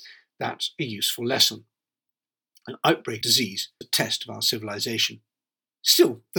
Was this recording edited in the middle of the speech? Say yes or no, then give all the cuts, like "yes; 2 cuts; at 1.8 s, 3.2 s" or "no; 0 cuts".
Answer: yes; 2 cuts; at 3.2 s, 3.8 s